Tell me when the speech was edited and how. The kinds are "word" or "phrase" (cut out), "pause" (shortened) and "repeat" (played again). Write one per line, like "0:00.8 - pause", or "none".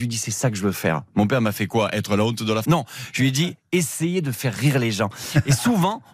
0:02.6 - word